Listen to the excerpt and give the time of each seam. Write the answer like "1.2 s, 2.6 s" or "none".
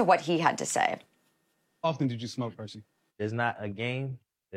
none